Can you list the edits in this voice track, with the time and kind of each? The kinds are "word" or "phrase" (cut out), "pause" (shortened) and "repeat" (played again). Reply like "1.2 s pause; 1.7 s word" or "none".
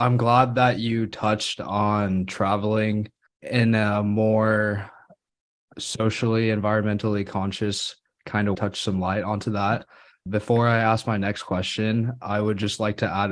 3.3 s pause; 8.5 s phrase; 10.3 s word